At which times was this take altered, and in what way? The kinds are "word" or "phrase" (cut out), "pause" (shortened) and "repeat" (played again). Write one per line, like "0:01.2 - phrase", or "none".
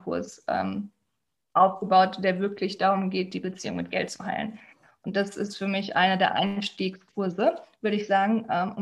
none